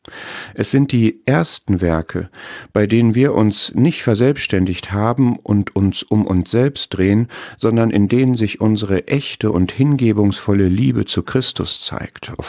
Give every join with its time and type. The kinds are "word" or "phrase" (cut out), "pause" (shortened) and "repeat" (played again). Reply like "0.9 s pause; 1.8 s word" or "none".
none